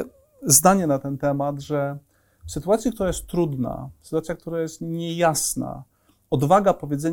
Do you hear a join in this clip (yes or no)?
no